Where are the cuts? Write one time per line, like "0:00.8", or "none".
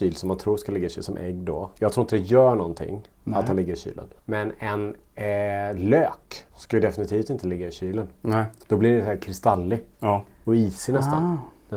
0:01.8
0:04.2
0:06.5
0:09.9